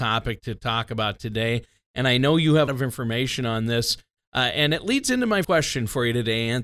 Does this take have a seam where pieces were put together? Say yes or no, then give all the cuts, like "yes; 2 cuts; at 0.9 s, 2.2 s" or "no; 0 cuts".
yes; 2 cuts; at 2.7 s, 5.4 s